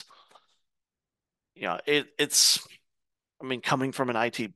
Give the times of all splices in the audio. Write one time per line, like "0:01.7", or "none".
none